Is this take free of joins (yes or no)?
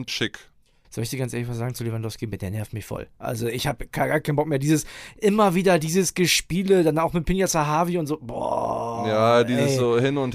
yes